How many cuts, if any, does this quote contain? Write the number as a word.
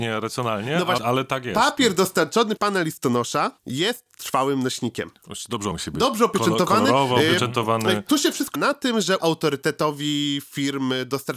six